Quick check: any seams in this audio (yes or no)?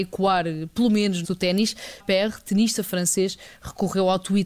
yes